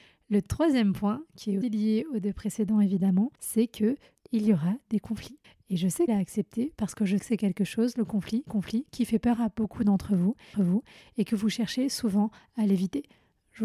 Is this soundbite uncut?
no; 8 cuts; at 1.6 s, 3.3 s, 4.1 s, 5.4 s, 6.1 s, 7.2 s, 8.5 s, 10.5 s

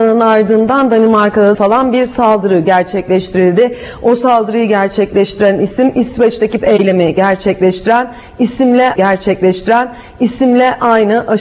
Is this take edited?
yes; 3 cuts; at 1.5 s, 6.6 s, 9.0 s

